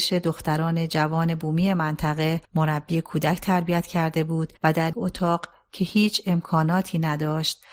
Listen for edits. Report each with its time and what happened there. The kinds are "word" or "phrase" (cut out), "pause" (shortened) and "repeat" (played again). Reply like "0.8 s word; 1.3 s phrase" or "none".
2.5 s pause; 4.6 s pause; 4.9 s word